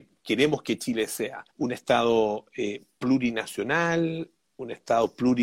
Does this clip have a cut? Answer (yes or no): yes